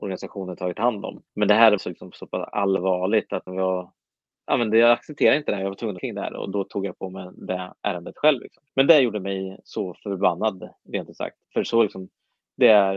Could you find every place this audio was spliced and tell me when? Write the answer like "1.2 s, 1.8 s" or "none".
1.3 s, 1.8 s, 3.5 s, 6.0 s, 8.7 s, 11.4 s